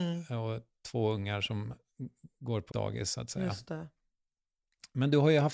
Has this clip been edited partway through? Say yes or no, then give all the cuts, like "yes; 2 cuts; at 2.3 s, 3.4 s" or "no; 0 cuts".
yes; 1 cut; at 2.7 s